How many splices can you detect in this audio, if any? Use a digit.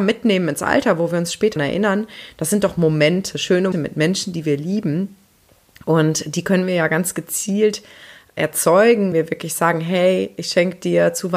3